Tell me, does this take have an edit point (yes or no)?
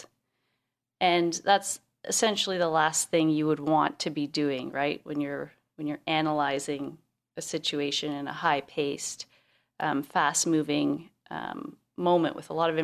no